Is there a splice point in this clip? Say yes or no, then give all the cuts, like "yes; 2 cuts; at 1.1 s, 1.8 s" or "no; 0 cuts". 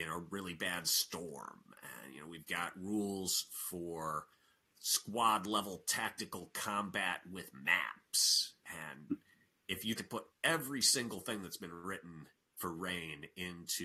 yes; 1 cut; at 10.0 s